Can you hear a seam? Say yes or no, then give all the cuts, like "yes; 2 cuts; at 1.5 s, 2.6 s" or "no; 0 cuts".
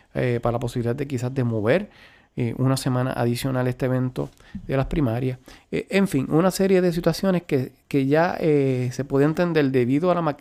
no; 0 cuts